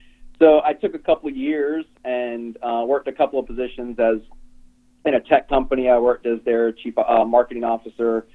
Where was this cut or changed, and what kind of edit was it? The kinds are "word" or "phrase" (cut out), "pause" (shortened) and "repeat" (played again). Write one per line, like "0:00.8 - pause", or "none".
none